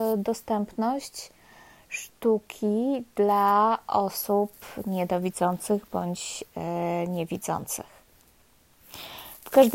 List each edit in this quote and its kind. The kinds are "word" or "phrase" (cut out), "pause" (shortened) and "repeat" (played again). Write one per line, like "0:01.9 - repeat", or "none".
none